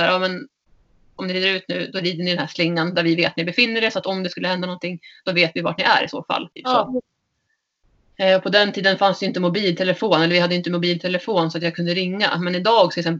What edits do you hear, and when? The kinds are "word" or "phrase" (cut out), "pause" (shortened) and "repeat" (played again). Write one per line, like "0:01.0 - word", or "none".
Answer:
0:03.4 - word
0:06.5 - pause